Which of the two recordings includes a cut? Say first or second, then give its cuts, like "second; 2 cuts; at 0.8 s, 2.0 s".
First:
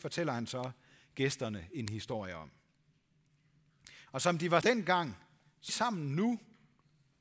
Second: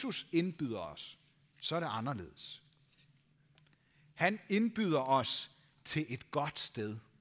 first; 2 cuts; at 4.6 s, 5.7 s